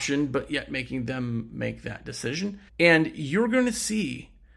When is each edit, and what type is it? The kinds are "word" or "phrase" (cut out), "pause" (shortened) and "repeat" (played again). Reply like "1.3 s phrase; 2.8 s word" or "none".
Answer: 2.7 s pause